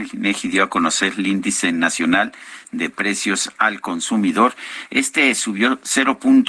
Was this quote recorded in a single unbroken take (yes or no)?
yes